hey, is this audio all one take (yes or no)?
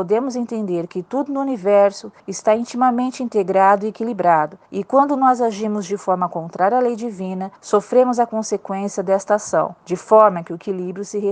no